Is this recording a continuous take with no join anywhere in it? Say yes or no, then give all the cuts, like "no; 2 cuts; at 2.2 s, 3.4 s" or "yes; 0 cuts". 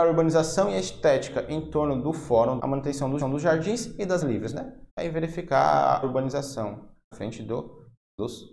no; 6 cuts; at 2.6 s, 3.2 s, 4.2 s, 4.9 s, 6.0 s, 7.1 s